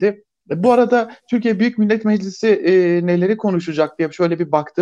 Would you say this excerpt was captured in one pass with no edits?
yes; 0 cuts

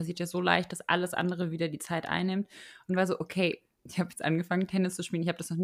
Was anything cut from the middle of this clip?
no; 0 cuts

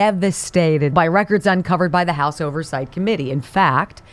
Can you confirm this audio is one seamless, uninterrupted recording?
no; 1 cut; at 0.9 s

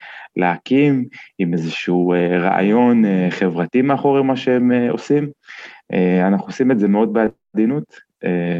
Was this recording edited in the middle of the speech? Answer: no; 0 cuts

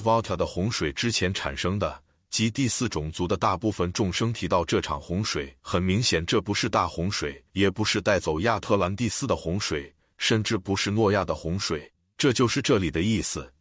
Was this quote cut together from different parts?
yes; 3 cuts; at 5.6 s, 7.5 s, 12.0 s

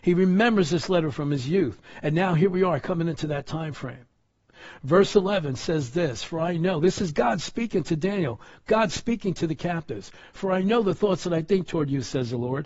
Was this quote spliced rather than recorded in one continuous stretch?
no; 0 cuts

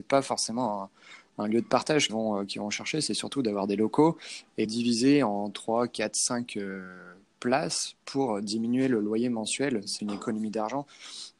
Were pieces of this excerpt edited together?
yes; 3 cuts; at 2.1 s, 4.7 s, 10.0 s

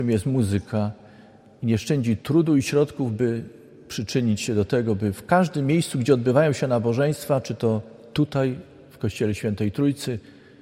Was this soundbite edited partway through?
no; 0 cuts

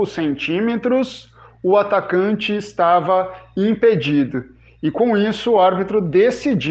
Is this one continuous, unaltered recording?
yes; 0 cuts

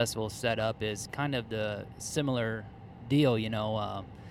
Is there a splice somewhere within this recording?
no; 0 cuts

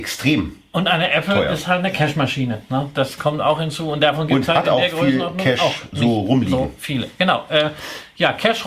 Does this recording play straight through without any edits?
yes; 0 cuts

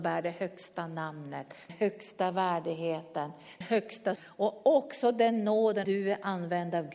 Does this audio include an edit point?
yes; 4 cuts; at 1.7 s, 3.6 s, 4.2 s, 5.8 s

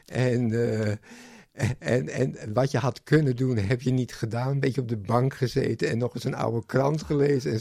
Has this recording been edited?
no; 0 cuts

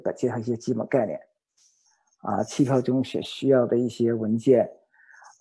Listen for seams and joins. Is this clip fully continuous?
yes; 0 cuts

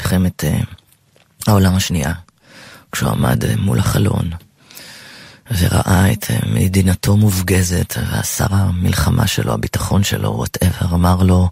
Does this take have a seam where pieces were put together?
no; 0 cuts

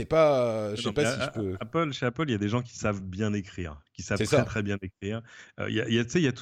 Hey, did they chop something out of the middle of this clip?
no; 0 cuts

